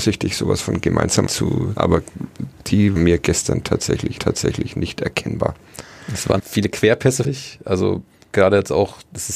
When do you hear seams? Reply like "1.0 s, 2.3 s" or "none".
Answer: 1.3 s, 1.8 s, 3.0 s, 4.2 s, 6.4 s, 7.2 s